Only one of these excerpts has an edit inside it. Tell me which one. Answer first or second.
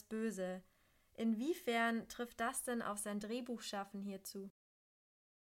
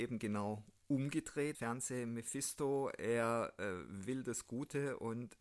second